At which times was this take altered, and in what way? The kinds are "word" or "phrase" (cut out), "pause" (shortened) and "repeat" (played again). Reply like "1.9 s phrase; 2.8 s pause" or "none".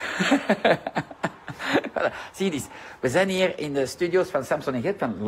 none